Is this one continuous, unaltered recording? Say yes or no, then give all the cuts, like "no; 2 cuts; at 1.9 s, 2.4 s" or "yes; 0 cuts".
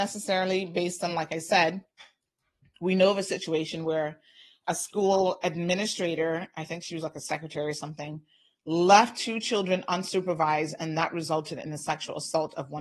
yes; 0 cuts